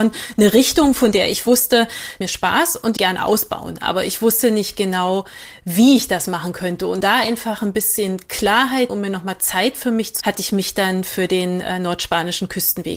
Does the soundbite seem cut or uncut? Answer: cut